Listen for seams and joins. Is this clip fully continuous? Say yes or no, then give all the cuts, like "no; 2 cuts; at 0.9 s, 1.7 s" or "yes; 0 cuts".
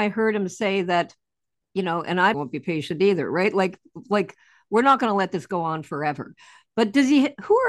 no; 1 cut; at 2.3 s